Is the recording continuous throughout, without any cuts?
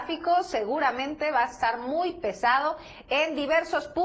yes; 0 cuts

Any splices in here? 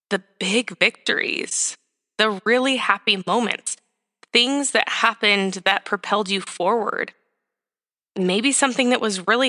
no; 0 cuts

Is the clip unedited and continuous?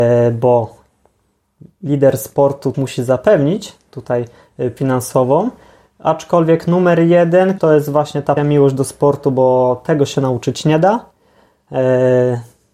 no; 4 cuts; at 2.7 s, 4.8 s, 7.6 s, 8.4 s

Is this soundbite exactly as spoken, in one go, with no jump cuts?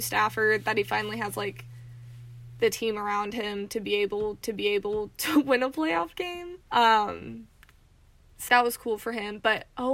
no; 3 cuts; at 4.4 s, 6.6 s, 8.5 s

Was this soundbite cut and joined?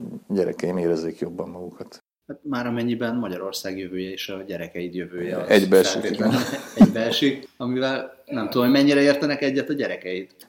no; 0 cuts

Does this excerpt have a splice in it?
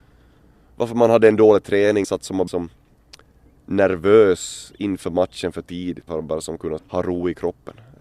yes; 4 cuts; at 2.0 s, 2.5 s, 6.1 s, 6.8 s

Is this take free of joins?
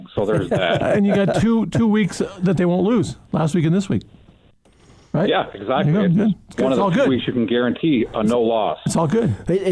yes; 0 cuts

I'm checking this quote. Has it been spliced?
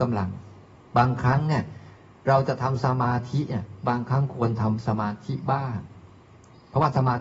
no; 0 cuts

